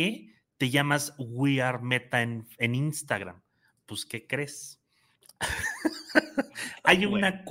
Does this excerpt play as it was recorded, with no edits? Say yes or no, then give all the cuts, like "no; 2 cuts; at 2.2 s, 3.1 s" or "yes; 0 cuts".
yes; 0 cuts